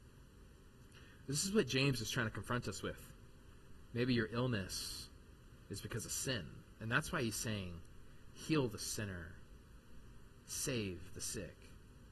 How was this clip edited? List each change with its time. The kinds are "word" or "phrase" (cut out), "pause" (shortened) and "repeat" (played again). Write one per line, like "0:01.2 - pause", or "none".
0:03.9 - pause
0:05.6 - pause